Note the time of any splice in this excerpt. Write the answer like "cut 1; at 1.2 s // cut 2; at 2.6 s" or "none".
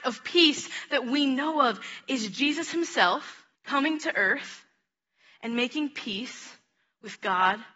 cut 1; at 3.5 s